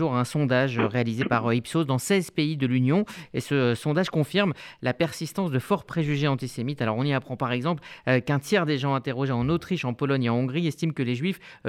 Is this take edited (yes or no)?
no